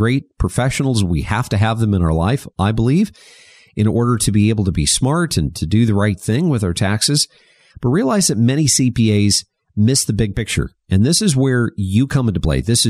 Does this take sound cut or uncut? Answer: uncut